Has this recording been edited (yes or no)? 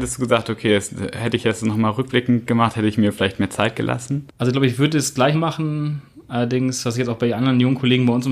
yes